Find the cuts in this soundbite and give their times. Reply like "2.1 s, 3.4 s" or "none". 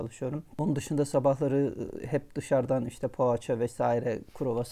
none

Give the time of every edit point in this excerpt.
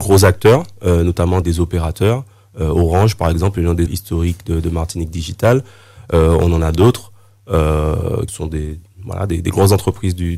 1.4 s, 3.9 s, 8.3 s

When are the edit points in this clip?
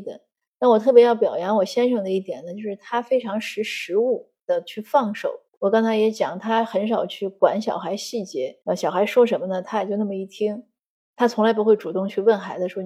5.5 s, 8.6 s

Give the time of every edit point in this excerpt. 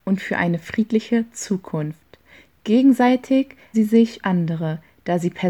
3.7 s, 4.2 s

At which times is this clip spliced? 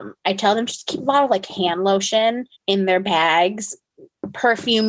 2.5 s

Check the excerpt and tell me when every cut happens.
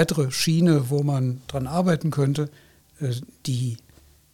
none

